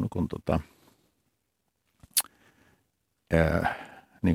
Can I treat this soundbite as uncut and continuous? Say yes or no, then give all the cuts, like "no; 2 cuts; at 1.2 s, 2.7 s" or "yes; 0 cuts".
yes; 0 cuts